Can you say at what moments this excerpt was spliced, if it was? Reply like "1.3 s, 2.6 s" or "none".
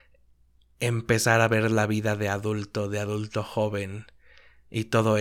none